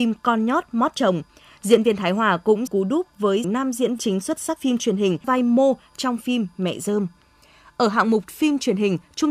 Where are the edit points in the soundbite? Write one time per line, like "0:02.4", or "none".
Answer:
0:02.7
0:03.4
0:04.0
0:04.6
0:05.2